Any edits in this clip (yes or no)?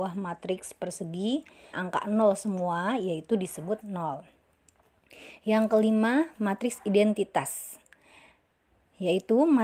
yes